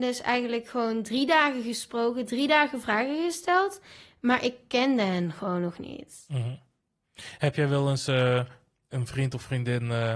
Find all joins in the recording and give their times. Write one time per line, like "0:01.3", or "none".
none